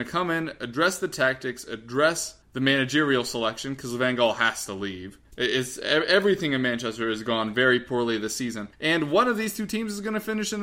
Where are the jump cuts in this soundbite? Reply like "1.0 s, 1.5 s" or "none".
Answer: 2.4 s, 5.2 s, 8.7 s